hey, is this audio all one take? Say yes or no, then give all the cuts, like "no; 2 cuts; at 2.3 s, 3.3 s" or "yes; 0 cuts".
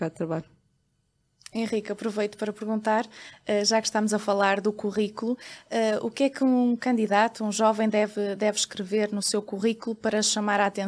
yes; 0 cuts